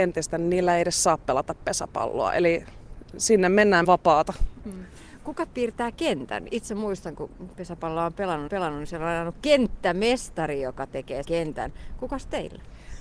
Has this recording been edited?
yes; 4 cuts; at 3.8 s, 5.5 s, 8.5 s, 11.2 s

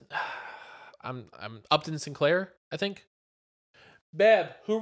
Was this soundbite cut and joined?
no; 0 cuts

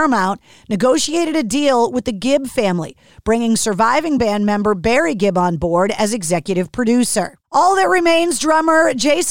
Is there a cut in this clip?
no; 0 cuts

